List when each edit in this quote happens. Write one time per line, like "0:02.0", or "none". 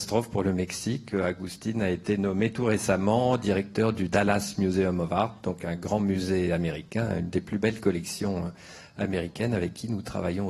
none